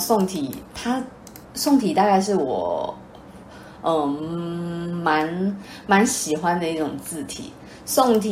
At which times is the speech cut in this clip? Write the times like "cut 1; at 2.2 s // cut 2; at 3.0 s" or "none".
cut 1; at 1.4 s